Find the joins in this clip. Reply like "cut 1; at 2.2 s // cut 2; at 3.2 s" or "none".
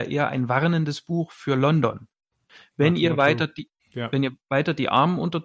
cut 1; at 3.8 s